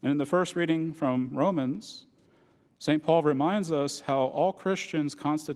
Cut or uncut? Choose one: uncut